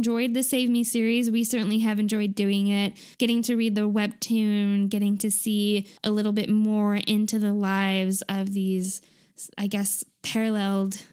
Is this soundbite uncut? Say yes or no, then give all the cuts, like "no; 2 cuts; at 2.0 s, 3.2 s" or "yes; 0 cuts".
no; 2 cuts; at 3.1 s, 6.0 s